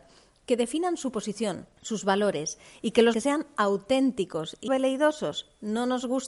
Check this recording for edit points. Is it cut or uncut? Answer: cut